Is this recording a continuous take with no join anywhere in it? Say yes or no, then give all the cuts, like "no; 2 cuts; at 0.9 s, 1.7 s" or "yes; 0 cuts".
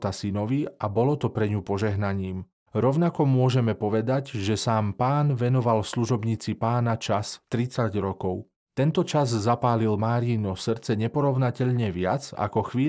yes; 0 cuts